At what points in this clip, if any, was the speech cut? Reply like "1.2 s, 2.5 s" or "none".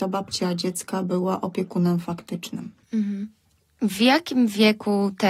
none